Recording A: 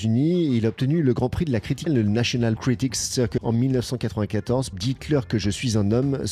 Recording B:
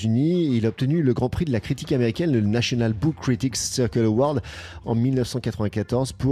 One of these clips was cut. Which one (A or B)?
A